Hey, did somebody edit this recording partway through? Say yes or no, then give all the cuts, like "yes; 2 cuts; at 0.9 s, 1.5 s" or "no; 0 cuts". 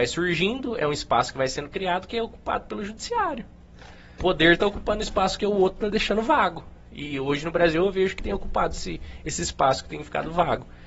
yes; 2 cuts; at 4.2 s, 8.2 s